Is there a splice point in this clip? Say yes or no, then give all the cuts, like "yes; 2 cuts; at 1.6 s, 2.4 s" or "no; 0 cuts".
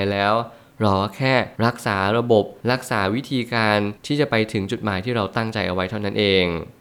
yes; 3 cuts; at 1.6 s, 2.6 s, 4.0 s